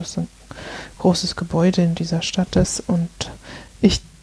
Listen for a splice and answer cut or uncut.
uncut